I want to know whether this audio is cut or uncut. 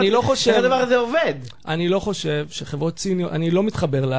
uncut